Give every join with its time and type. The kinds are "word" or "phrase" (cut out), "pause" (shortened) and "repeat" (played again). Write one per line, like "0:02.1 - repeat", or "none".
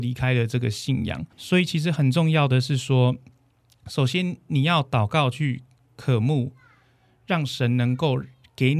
0:01.3 - pause